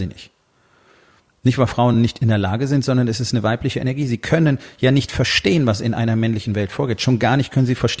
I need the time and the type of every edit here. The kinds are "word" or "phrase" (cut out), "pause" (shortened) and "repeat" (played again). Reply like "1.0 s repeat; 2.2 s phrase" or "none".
none